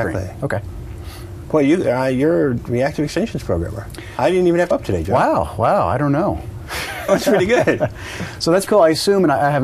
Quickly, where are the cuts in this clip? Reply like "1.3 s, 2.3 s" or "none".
4.7 s, 7.1 s, 8.7 s